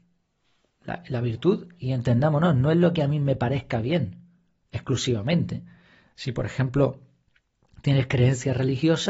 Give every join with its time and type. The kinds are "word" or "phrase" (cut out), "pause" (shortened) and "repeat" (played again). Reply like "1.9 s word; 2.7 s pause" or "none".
none